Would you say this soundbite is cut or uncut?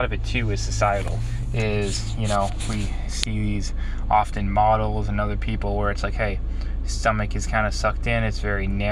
uncut